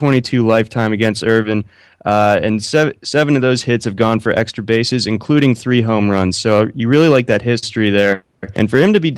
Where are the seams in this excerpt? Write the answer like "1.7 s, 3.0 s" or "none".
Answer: none